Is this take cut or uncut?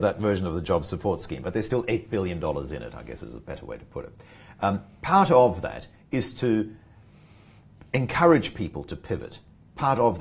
uncut